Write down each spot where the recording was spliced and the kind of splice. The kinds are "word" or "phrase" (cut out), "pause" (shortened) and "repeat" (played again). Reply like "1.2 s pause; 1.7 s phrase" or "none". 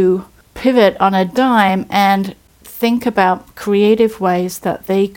none